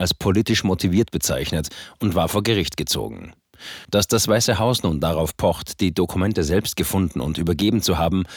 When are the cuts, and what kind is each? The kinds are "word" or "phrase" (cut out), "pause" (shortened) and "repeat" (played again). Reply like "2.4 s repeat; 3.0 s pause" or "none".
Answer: none